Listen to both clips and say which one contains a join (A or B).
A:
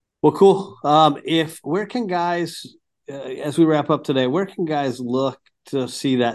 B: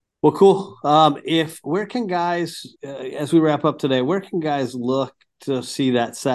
B